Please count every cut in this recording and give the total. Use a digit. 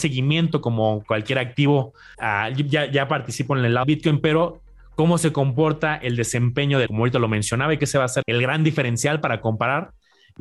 6